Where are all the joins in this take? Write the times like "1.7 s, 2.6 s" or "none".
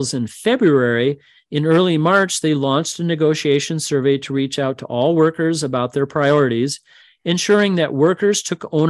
none